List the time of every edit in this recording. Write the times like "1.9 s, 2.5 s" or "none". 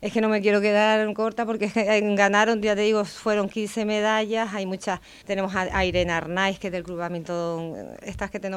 5.2 s